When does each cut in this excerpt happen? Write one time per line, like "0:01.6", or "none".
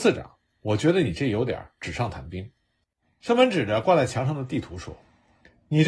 none